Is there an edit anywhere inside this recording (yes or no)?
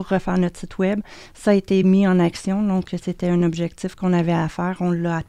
no